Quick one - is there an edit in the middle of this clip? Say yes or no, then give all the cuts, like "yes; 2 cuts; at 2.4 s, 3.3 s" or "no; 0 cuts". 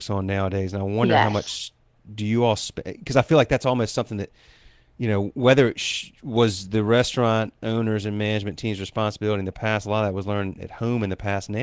no; 0 cuts